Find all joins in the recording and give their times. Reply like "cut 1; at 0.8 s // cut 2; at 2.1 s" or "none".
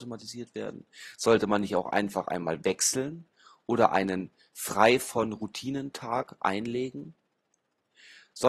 none

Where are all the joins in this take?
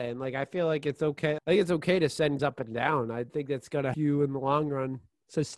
cut 1; at 1.4 s // cut 2; at 2.4 s // cut 3; at 3.3 s // cut 4; at 3.9 s

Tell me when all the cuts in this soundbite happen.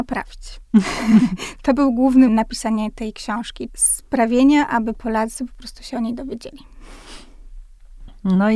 cut 1; at 2.3 s // cut 2; at 3.7 s

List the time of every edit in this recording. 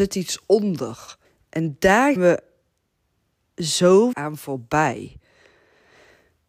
cut 1; at 1.2 s // cut 2; at 2.2 s // cut 3; at 4.1 s

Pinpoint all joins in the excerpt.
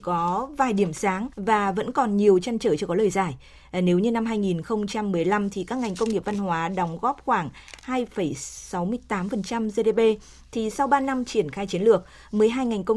cut 1; at 1.3 s

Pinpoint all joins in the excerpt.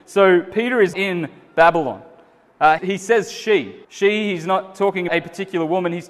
cut 1; at 0.9 s // cut 2; at 2.8 s // cut 3; at 3.8 s // cut 4; at 5.1 s

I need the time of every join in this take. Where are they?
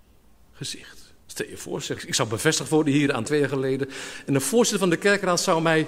cut 1; at 1.2 s // cut 2; at 2.0 s // cut 3; at 3.2 s

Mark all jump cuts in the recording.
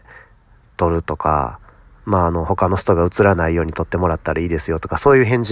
none

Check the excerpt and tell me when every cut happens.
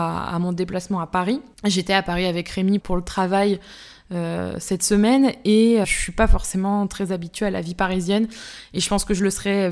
cut 1; at 2.8 s // cut 2; at 5.8 s

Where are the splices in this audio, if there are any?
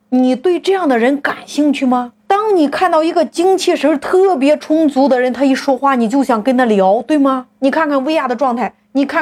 cut 1; at 2.2 s

